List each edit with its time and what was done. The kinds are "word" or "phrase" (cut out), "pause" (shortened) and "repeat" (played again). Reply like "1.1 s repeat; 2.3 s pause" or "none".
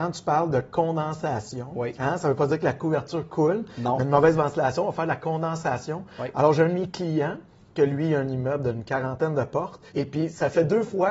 9.9 s pause